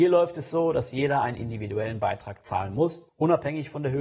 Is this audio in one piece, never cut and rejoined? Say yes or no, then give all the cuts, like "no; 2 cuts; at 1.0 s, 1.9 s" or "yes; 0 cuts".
no; 1 cut; at 3.1 s